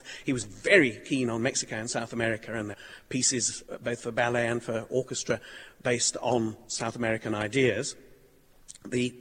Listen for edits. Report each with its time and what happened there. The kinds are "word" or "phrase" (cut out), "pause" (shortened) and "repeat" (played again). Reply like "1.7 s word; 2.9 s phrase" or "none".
2.7 s word